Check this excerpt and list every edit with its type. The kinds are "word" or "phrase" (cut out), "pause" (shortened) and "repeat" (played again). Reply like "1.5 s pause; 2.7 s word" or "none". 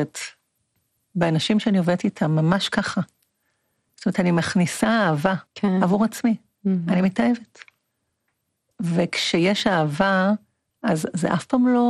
5.5 s pause